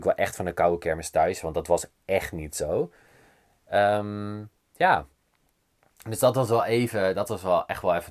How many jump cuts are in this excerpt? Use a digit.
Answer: 0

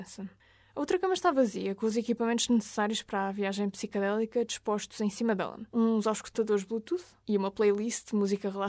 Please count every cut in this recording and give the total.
2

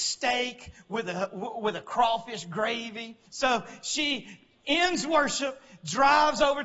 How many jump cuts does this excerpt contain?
1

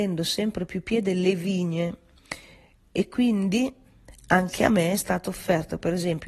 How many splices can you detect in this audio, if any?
0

